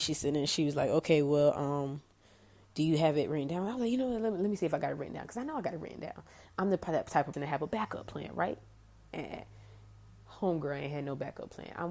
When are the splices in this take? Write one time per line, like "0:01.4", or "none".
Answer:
0:07.3